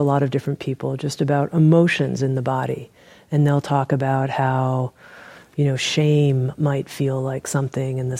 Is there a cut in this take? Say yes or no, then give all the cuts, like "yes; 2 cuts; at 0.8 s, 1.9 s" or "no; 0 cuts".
no; 0 cuts